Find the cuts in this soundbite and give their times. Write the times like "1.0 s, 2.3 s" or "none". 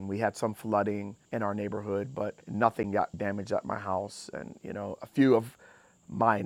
1.3 s, 2.4 s, 3.1 s